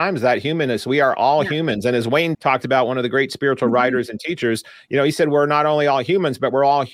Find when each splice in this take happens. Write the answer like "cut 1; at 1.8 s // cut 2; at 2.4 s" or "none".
cut 1; at 2.3 s